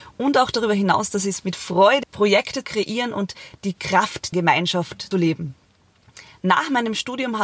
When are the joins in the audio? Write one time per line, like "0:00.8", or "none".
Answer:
0:01.4
0:02.0
0:02.6
0:04.3
0:05.1

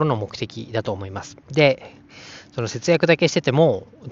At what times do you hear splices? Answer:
0:01.4

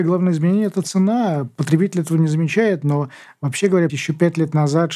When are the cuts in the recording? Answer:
0:03.9

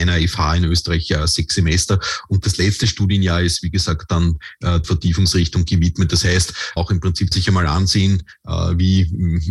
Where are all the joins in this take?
0:04.8
0:06.8
0:07.3

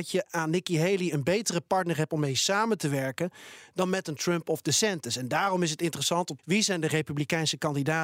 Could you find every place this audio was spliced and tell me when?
0:06.4

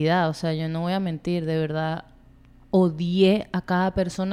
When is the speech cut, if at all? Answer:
none

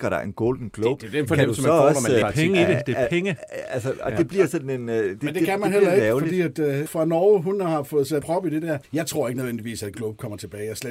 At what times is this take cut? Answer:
0:02.2
0:06.9
0:08.2
0:08.8
0:09.9

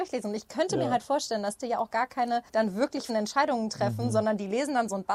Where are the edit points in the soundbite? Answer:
0:01.6
0:02.5
0:03.1

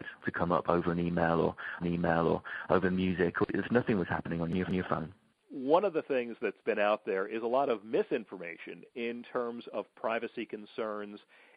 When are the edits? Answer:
0:01.8
0:03.5
0:04.7

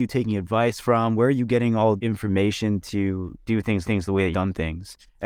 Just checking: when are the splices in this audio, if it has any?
0:02.0
0:03.4
0:03.8
0:04.3

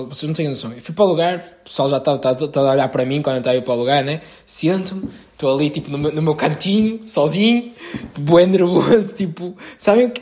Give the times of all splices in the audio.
0:08.1

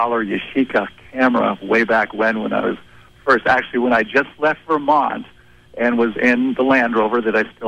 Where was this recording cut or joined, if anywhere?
none

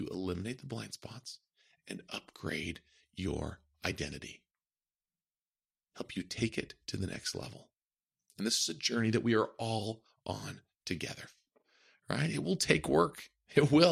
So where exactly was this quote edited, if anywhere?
none

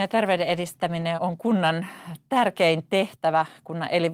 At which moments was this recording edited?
0:01.2

